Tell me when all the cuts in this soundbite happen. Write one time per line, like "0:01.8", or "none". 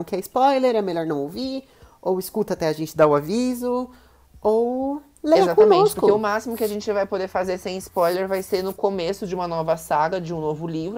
none